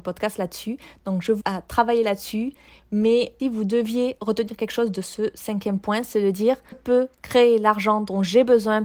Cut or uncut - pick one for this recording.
cut